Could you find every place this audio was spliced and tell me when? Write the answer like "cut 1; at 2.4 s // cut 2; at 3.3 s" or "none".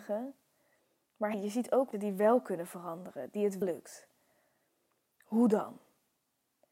cut 1; at 1.3 s // cut 2; at 1.9 s // cut 3; at 3.6 s